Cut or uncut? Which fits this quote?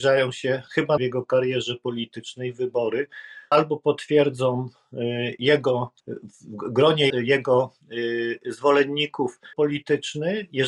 cut